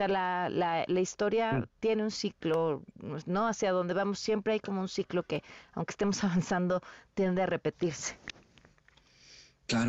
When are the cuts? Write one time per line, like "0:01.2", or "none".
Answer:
none

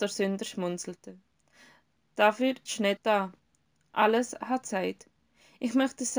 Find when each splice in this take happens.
0:02.7
0:03.0
0:04.6

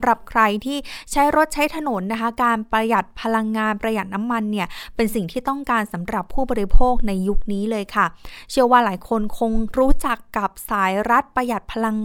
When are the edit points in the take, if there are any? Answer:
none

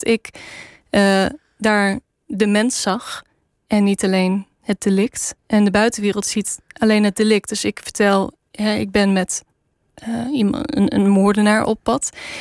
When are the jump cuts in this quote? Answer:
0:05.4

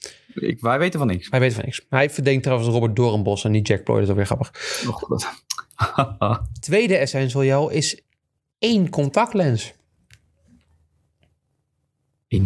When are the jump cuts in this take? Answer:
none

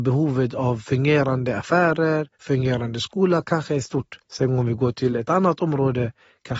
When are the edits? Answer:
0:02.3
0:04.2

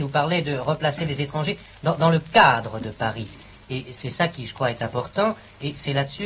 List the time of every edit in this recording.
none

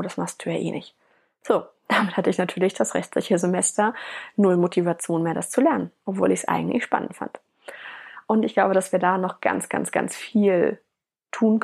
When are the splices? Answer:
none

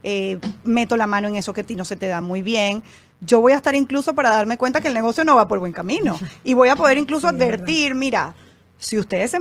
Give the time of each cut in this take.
none

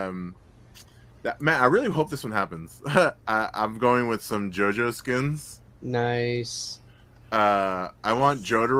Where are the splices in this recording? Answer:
0:03.2

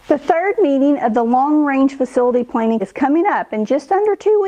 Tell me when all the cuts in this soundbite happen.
0:02.8

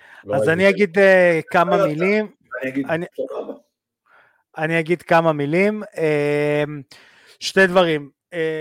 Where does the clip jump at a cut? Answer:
none

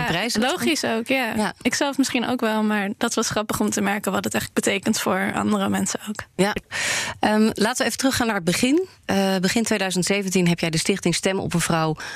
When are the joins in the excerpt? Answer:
none

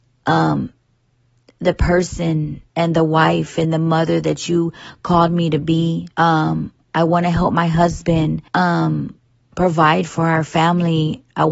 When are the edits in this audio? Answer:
0:02.7
0:06.1
0:08.5

